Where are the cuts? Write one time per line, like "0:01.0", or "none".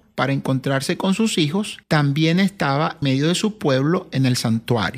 0:01.8
0:03.0